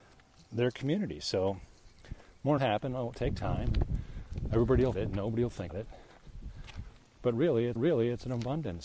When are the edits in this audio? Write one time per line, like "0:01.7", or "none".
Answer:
0:02.6
0:04.9
0:05.7
0:07.8

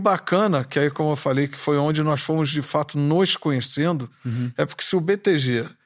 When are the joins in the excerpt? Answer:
none

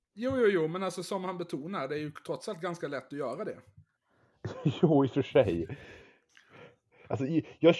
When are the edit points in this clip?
none

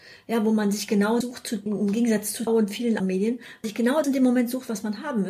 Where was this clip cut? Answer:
0:01.2
0:01.7
0:02.5
0:03.0
0:03.6
0:04.0

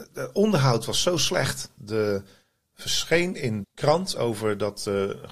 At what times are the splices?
0:01.8
0:03.6
0:04.2

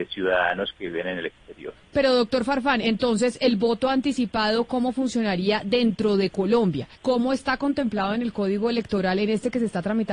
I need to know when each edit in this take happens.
0:07.0

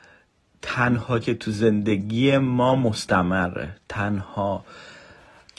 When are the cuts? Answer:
0:01.2

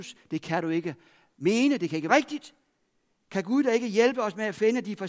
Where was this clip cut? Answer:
0:02.1

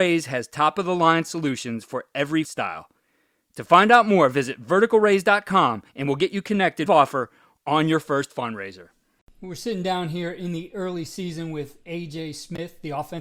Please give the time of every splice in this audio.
0:02.4
0:05.9
0:06.9
0:09.2

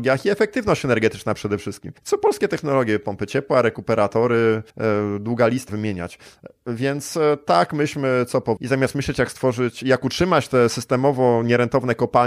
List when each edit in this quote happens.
0:02.0
0:04.7
0:05.7
0:08.6

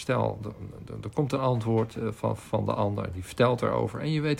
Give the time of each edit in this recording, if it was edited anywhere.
none

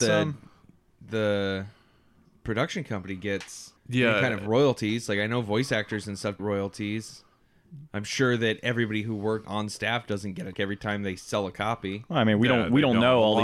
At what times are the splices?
0:03.8
0:06.4
0:09.4
0:10.5

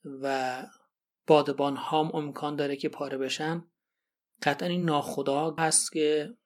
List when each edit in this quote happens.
none

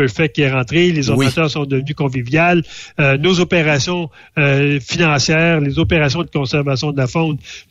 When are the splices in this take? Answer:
0:06.2

